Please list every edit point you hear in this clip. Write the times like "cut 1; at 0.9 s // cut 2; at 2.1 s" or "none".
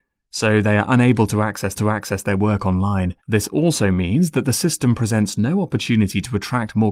cut 1; at 1.8 s // cut 2; at 3.2 s